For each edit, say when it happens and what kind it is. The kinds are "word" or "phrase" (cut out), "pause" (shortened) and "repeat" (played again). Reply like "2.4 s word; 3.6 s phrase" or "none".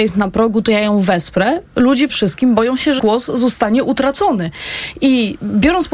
2.1 s word; 3.0 s word